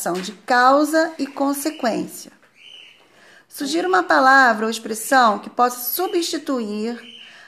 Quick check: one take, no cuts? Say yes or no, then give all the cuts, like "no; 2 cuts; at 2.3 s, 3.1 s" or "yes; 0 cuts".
yes; 0 cuts